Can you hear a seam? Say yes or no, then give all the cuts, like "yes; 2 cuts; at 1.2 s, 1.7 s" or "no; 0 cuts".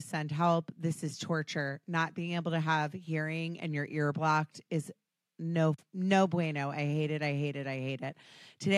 no; 0 cuts